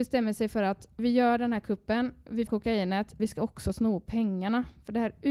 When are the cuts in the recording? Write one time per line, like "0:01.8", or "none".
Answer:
0:01.0
0:02.5
0:03.2